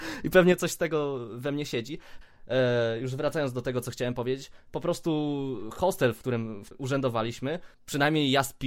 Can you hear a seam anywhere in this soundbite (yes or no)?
yes